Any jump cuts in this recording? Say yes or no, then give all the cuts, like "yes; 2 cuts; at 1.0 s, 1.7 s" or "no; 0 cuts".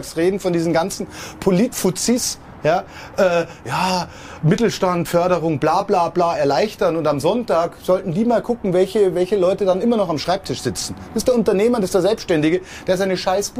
no; 0 cuts